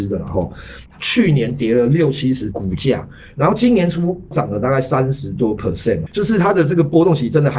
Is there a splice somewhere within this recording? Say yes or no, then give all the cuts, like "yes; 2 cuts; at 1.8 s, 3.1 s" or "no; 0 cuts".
yes; 2 cuts; at 2.5 s, 6.1 s